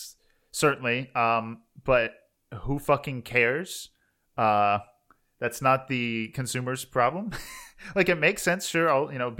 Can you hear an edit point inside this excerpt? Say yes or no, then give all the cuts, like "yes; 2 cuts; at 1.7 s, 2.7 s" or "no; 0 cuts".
no; 0 cuts